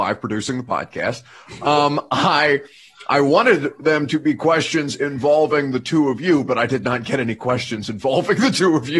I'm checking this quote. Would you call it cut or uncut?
uncut